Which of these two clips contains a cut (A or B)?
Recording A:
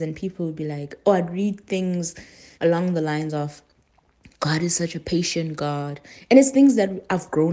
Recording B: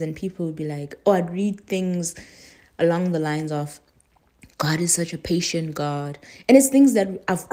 A